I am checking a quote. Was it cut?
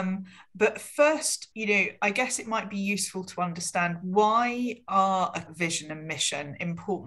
yes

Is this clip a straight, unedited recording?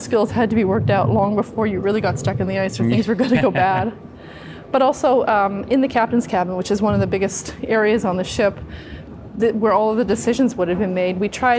yes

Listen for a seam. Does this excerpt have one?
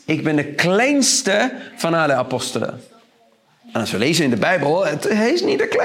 no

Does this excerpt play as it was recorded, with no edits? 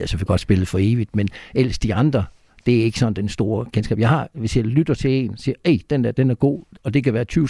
yes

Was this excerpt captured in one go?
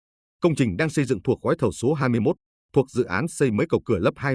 yes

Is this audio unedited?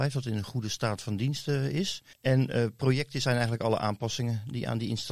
no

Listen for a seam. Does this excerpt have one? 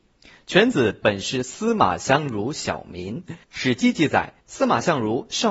yes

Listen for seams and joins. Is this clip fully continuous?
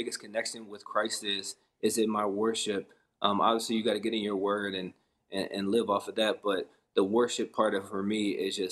yes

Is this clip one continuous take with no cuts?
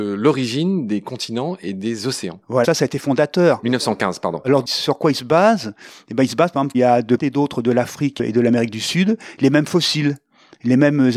no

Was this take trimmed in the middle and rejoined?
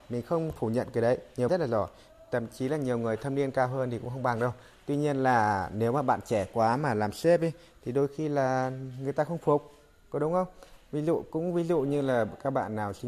yes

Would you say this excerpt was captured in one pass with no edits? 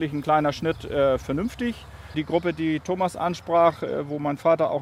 yes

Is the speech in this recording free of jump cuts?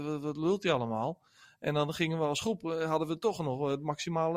yes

